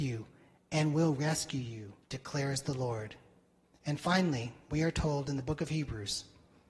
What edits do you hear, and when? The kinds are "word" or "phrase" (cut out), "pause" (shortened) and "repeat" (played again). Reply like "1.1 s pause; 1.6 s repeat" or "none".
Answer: 2.0 s pause